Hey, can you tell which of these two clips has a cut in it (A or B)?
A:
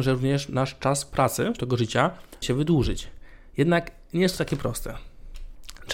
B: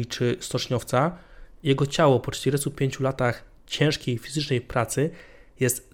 A